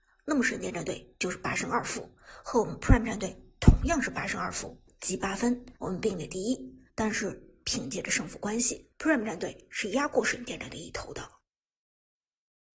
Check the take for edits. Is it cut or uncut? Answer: cut